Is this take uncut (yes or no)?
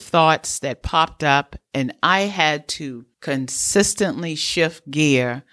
no